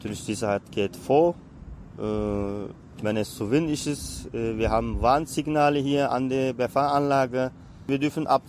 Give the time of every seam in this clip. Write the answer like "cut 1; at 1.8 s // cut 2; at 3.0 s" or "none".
none